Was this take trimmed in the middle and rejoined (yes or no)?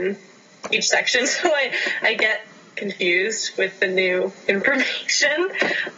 no